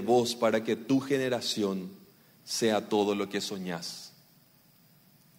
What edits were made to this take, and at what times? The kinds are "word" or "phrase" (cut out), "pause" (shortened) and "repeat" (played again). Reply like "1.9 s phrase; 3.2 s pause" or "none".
none